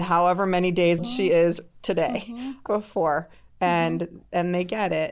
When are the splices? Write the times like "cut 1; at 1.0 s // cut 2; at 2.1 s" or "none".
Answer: cut 1; at 1.0 s // cut 2; at 2.7 s